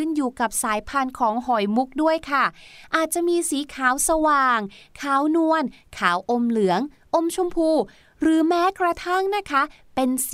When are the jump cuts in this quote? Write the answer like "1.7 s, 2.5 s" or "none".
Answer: none